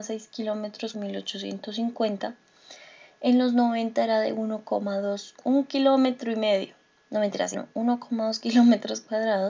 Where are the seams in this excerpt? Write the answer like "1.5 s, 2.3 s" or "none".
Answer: 0.9 s, 7.5 s